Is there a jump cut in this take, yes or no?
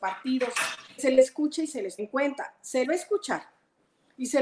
yes